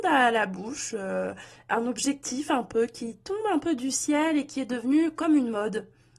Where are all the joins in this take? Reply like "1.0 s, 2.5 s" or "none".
none